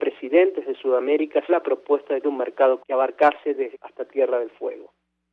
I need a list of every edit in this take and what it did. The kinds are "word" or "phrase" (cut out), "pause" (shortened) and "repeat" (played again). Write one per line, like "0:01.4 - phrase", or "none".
0:01.5 - word
0:02.2 - word
0:02.8 - word
0:03.7 - word